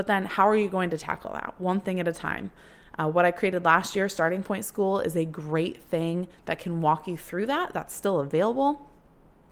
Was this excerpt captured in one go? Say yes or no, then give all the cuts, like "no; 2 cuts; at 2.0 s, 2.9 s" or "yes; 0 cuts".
yes; 0 cuts